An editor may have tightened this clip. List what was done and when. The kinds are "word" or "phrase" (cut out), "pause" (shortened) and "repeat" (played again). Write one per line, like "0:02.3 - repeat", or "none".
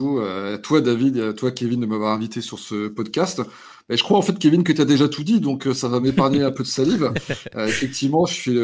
none